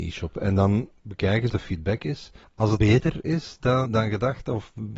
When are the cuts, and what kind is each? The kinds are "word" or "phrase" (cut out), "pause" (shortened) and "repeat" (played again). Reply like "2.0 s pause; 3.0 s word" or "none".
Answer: 1.0 s pause; 1.5 s word; 2.4 s pause; 2.8 s word; 3.9 s word

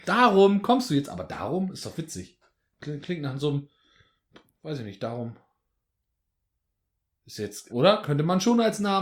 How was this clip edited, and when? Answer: 7.7 s word

